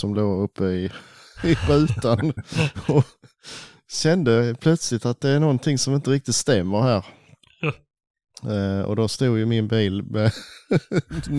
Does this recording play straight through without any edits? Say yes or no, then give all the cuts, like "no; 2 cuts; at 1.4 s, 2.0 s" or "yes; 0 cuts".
yes; 0 cuts